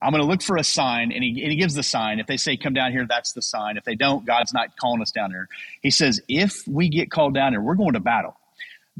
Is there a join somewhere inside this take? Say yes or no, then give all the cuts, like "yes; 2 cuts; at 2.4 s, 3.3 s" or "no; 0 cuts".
no; 0 cuts